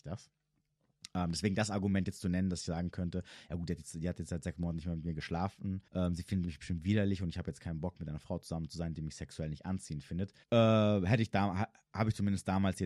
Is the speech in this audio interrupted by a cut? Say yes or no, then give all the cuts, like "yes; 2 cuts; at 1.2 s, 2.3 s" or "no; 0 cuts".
yes; 2 cuts; at 5.9 s, 10.4 s